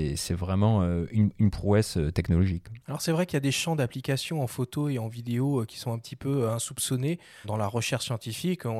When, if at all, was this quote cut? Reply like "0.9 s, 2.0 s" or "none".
2.8 s, 7.4 s